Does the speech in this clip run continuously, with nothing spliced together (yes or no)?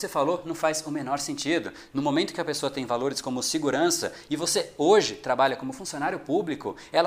yes